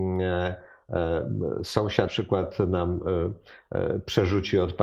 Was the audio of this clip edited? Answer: yes; 1 cut; at 2.1 s

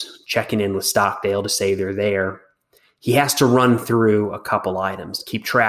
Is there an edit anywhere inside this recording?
no; 0 cuts

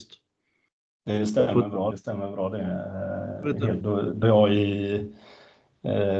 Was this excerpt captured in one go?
no; 3 cuts; at 1.9 s, 3.8 s, 4.2 s

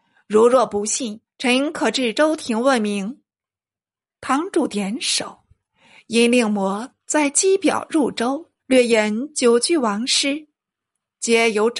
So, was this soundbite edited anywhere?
yes; 2 cuts; at 1.3 s, 8.6 s

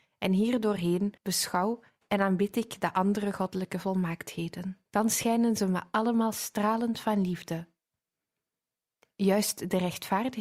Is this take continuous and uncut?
no; 2 cuts; at 1.2 s, 4.9 s

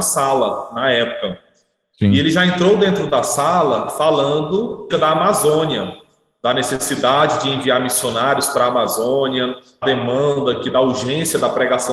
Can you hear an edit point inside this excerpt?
yes; 2 cuts; at 4.9 s, 9.8 s

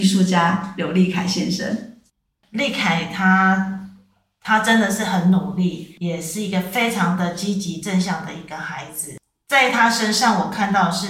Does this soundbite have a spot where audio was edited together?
yes; 1 cut; at 2.1 s

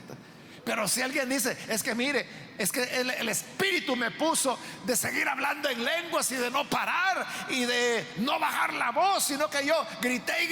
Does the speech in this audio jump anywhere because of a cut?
no; 0 cuts

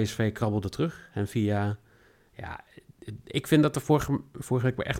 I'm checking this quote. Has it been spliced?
no; 0 cuts

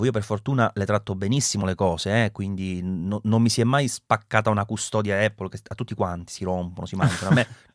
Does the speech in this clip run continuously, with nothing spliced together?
yes; 0 cuts

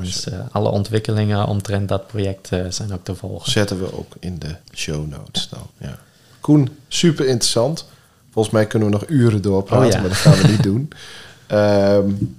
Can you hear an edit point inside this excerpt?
yes; 2 cuts; at 4.6 s, 5.7 s

